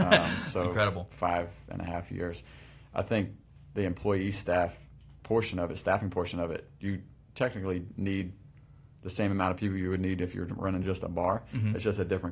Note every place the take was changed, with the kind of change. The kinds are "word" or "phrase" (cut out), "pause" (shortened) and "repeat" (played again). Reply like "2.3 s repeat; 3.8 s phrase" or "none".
none